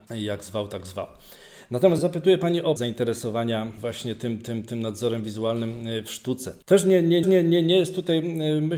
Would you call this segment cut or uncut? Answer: cut